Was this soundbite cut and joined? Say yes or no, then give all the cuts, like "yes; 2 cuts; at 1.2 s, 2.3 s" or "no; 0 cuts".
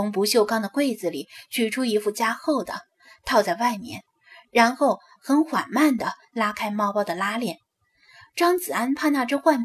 no; 0 cuts